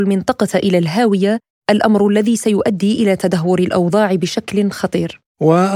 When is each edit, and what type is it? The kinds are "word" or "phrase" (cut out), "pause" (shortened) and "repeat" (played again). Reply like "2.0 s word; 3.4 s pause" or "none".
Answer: none